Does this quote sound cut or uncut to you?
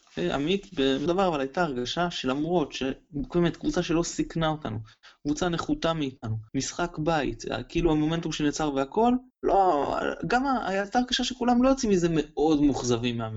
cut